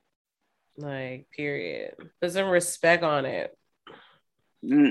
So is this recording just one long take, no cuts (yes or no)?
no